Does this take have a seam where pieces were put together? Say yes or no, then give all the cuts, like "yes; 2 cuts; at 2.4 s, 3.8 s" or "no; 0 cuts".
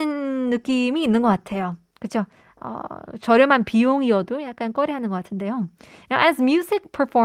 no; 0 cuts